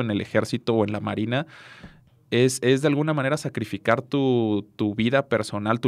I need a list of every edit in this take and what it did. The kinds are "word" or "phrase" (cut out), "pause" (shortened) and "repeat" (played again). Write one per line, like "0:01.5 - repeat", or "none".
none